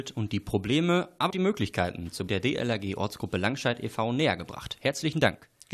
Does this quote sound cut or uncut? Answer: cut